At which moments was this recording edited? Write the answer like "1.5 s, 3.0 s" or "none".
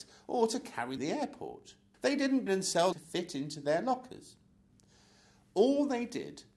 1.0 s, 1.9 s, 2.5 s, 2.9 s